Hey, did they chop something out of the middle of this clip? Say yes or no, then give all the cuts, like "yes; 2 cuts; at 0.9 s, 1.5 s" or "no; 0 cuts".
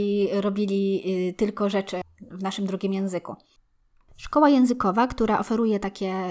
no; 0 cuts